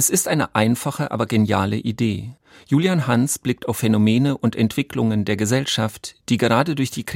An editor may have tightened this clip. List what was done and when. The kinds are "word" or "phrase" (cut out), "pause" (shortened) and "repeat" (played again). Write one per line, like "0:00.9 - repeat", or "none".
none